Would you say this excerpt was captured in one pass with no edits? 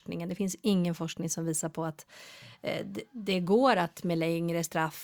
yes; 0 cuts

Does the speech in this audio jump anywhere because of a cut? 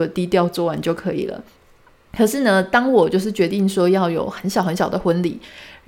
no; 0 cuts

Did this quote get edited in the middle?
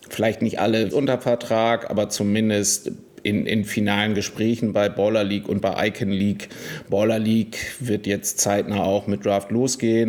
yes; 2 cuts; at 0.9 s, 3.1 s

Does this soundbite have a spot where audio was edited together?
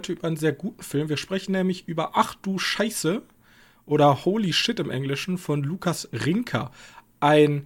no; 0 cuts

